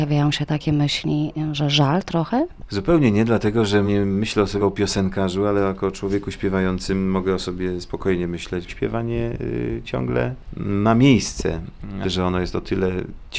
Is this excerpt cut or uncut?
cut